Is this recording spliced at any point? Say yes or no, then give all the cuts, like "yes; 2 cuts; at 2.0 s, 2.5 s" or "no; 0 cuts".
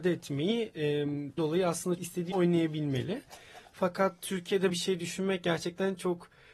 yes; 4 cuts; at 1.4 s, 2.0 s, 2.3 s, 4.7 s